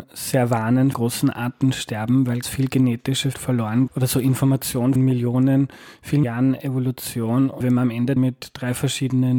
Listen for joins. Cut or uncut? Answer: cut